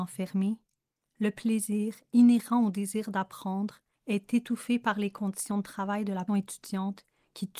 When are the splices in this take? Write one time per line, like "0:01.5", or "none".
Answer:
0:06.3